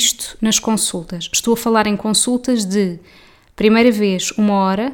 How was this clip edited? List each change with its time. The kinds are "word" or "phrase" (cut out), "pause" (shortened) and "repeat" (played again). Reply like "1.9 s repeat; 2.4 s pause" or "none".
none